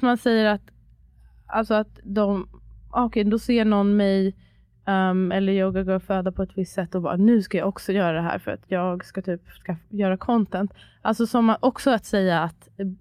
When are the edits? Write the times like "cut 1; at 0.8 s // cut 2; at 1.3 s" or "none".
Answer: none